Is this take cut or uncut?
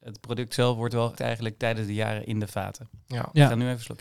cut